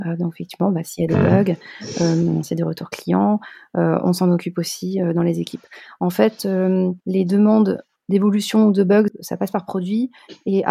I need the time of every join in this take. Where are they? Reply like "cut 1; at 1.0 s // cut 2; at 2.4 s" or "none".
cut 1; at 7.0 s // cut 2; at 9.1 s